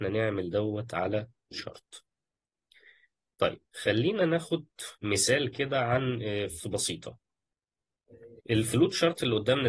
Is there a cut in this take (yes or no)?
yes